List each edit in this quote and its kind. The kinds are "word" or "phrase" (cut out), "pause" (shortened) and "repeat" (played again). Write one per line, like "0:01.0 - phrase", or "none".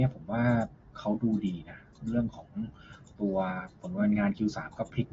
none